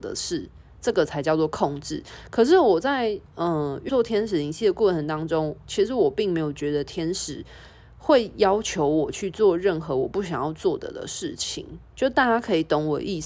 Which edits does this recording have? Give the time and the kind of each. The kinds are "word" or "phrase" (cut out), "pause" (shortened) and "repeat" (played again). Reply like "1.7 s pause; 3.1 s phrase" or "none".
3.9 s word